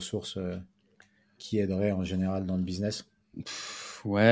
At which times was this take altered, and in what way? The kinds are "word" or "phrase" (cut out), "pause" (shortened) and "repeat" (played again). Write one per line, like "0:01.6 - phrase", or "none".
none